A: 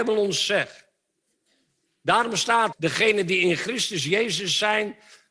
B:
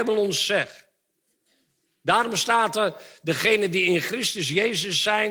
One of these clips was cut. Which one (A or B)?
A